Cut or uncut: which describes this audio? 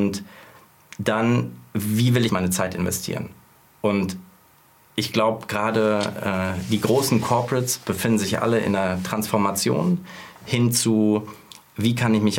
cut